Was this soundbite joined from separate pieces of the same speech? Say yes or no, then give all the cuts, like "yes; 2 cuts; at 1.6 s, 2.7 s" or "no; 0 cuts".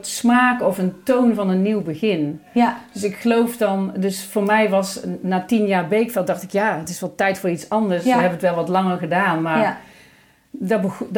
no; 0 cuts